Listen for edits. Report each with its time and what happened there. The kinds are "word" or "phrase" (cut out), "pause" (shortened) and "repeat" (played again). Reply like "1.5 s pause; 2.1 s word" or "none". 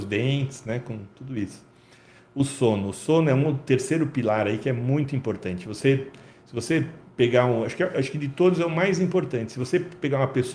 none